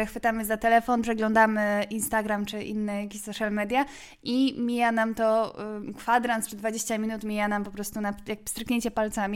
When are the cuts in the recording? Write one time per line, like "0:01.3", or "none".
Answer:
none